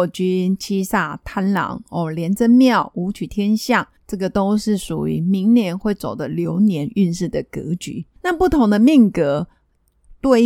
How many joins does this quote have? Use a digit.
2